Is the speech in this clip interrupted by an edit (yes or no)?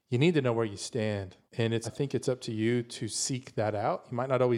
yes